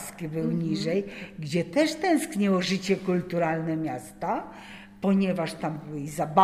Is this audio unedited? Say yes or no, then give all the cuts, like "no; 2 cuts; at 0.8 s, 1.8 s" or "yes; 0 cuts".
yes; 0 cuts